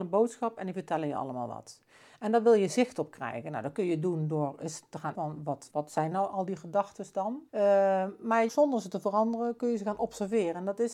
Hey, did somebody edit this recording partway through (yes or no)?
yes